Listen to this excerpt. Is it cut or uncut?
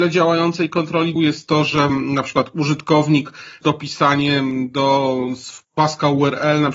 cut